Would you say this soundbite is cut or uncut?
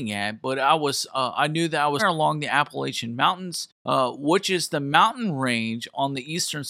cut